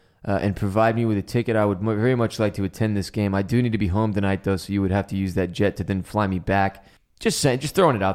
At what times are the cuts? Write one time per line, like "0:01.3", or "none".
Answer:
0:07.0